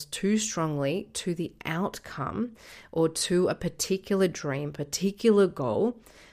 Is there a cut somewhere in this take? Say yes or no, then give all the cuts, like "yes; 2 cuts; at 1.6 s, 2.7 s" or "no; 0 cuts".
no; 0 cuts